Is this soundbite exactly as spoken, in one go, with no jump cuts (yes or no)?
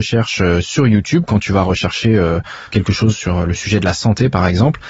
yes